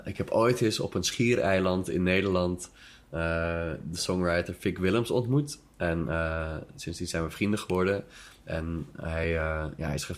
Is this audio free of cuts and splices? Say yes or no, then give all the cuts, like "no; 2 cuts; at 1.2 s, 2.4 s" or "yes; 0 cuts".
yes; 0 cuts